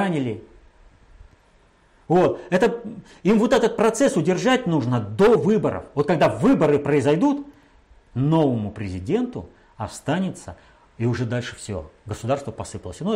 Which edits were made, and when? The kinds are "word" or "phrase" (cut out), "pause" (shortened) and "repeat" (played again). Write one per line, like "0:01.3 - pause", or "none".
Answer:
none